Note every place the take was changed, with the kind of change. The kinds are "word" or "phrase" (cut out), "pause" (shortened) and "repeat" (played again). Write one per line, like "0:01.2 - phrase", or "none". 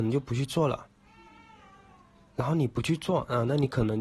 none

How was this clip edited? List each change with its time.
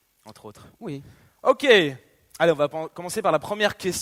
none

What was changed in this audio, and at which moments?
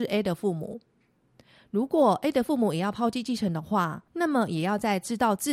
0:04.1 - pause

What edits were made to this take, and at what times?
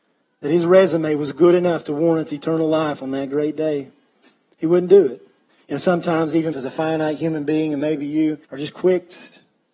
0:05.5 - pause
0:06.5 - word
0:08.4 - pause

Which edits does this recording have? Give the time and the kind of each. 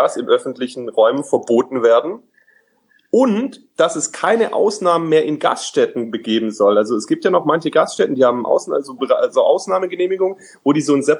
none

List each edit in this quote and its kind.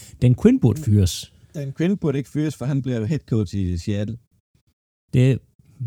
0:01.4 - pause

